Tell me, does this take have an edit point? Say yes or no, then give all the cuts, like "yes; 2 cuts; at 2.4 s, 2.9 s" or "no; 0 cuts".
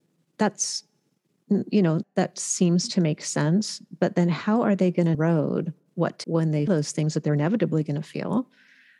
yes; 4 cuts; at 2.0 s, 5.1 s, 6.2 s, 6.7 s